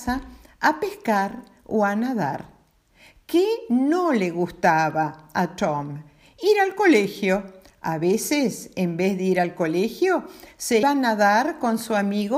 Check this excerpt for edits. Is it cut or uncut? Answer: cut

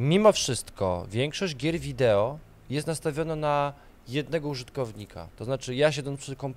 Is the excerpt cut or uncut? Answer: uncut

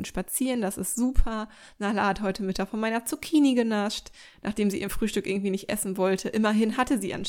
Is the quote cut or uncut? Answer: uncut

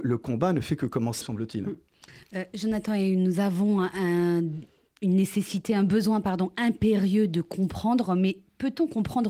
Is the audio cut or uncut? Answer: cut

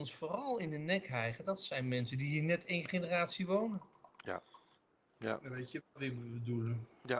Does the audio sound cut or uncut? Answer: uncut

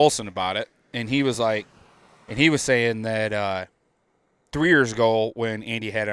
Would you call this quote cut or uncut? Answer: uncut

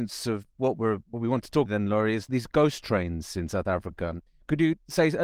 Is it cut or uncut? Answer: cut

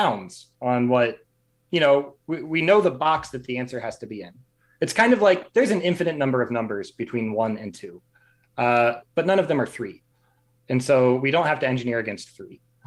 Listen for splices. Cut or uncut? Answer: uncut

